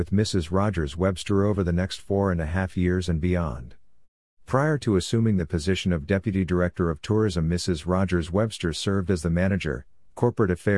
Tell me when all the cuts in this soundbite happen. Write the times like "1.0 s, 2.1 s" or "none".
none

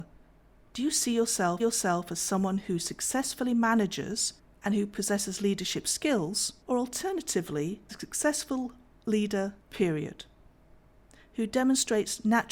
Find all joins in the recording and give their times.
1.6 s, 4.4 s, 6.6 s, 7.9 s, 9.6 s

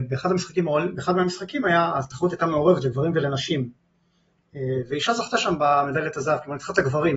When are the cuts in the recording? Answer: none

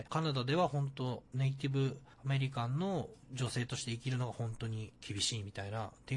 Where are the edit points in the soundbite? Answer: 4.9 s

